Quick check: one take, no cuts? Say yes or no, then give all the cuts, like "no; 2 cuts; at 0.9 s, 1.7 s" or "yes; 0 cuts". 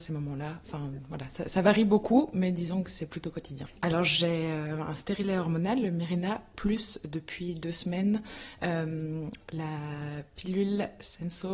yes; 0 cuts